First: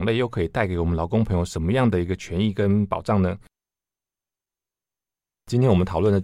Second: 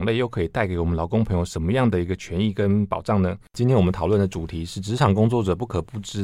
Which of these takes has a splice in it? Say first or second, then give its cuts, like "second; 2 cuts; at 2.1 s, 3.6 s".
second; 1 cut; at 3.5 s